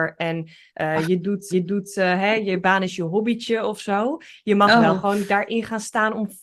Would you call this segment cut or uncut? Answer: cut